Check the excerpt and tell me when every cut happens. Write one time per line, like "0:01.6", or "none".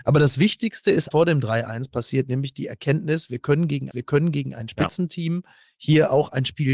0:01.1
0:03.9